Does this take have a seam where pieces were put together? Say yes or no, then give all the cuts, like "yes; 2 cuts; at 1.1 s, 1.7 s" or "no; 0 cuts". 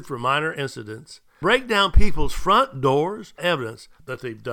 yes; 2 cuts; at 1.4 s, 3.4 s